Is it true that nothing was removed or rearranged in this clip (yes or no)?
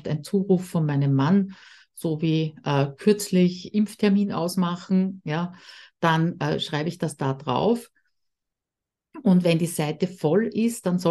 yes